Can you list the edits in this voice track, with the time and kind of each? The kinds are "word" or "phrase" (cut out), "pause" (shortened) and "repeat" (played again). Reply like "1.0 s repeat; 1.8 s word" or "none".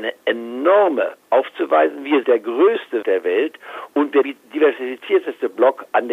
1.2 s word; 2.2 s word; 3.0 s word; 4.2 s word